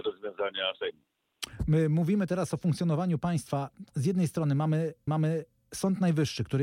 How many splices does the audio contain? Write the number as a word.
one